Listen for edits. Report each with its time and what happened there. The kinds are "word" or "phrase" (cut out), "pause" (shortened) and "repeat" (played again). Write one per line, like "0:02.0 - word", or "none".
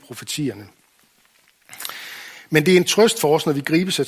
none